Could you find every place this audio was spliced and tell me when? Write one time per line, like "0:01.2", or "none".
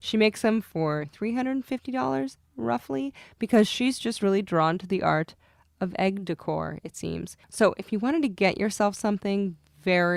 none